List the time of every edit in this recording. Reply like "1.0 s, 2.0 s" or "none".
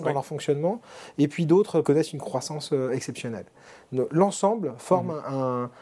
1.8 s